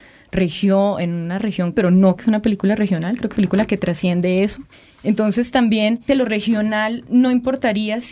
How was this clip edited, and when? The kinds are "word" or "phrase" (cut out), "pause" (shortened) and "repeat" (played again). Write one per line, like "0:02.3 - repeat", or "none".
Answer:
0:01.7 - word
0:02.2 - word
0:03.4 - phrase
0:04.7 - pause
0:06.1 - word

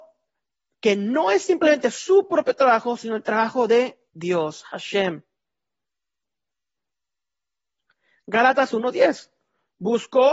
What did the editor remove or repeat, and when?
0:04.1 - pause

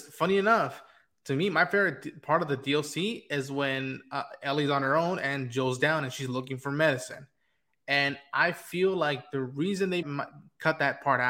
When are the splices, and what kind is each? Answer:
0:10.0 - word

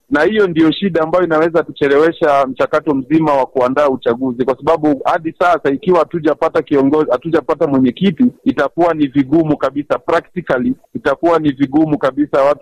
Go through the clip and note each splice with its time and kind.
0:01.6 - word
0:08.4 - pause
0:10.8 - pause

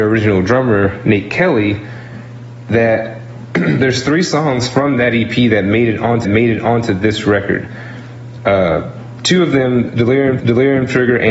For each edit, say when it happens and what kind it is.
0:06.2 - repeat
0:10.4 - repeat

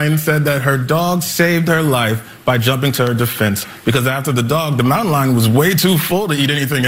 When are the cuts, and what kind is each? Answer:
none

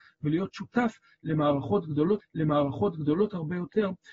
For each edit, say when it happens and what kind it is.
0:02.2 - repeat

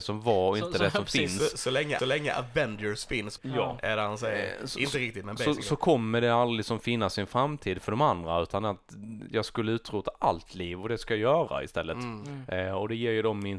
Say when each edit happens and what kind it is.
0:02.0 - repeat
0:03.4 - word

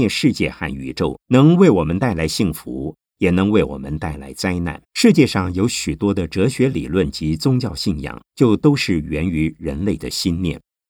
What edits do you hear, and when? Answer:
0:01.2 - pause
0:04.8 - pause
0:08.3 - pause

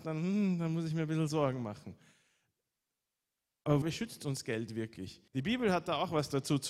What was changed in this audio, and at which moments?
0:03.8 - word
0:05.3 - pause

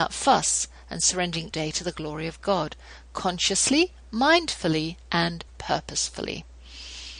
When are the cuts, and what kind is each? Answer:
0:01.5 - phrase
0:05.5 - pause

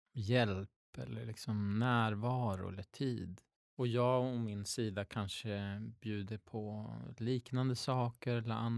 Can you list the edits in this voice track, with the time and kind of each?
0:03.6 - pause

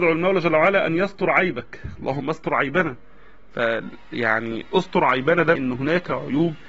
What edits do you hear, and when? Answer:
0:05.6 - word

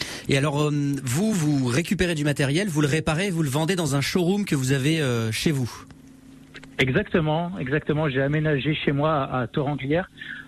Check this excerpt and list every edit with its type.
none

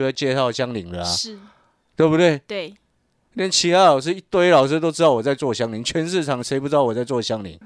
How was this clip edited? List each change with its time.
none

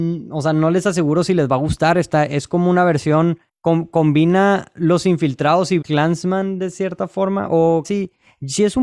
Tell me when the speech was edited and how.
0:05.8 - word
0:07.8 - word

